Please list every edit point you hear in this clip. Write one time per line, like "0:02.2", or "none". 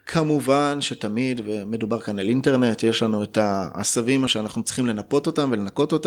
0:04.3

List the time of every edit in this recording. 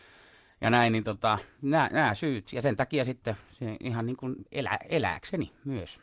0:04.5

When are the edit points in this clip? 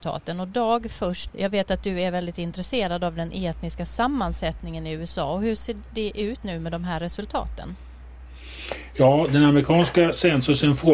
0:01.3
0:06.4

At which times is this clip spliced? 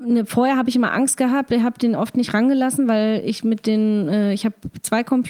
none

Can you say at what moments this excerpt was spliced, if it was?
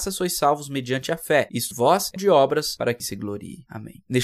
0:01.7
0:02.2
0:03.0

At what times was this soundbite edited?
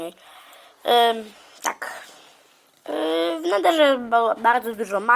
none

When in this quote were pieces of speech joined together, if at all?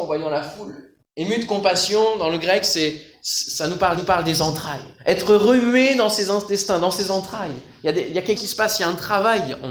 0:01.0
0:04.0
0:05.0
0:08.4

